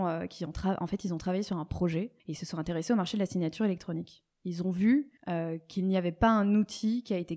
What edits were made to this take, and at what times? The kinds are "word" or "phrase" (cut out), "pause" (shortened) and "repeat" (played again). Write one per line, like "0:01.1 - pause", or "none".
0:02.2 - pause
0:05.2 - pause